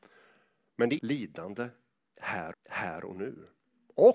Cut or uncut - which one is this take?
cut